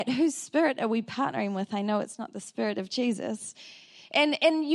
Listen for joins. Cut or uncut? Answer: uncut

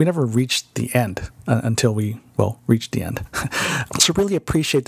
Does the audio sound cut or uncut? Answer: uncut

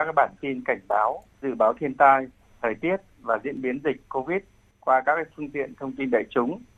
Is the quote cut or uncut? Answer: uncut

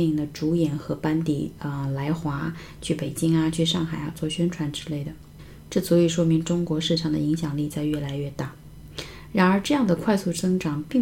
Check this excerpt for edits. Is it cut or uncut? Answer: uncut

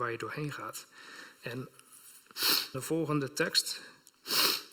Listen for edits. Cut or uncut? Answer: cut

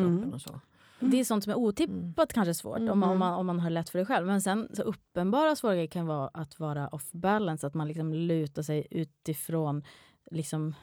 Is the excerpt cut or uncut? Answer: uncut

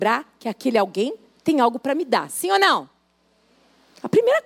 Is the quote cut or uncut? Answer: uncut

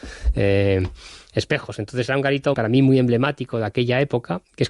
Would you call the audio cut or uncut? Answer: cut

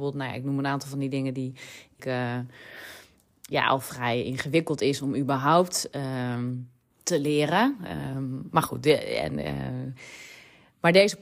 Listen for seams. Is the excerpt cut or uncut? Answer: cut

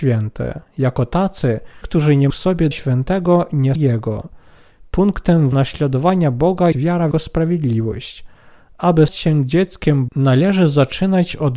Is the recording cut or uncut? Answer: cut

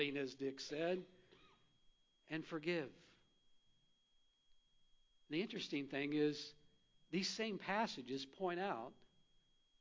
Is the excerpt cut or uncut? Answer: uncut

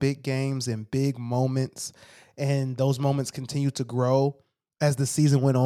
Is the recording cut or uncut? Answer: uncut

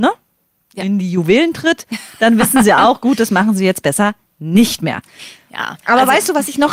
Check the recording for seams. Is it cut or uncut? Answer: uncut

